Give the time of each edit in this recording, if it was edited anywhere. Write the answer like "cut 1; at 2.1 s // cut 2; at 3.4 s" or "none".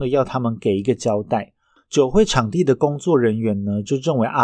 none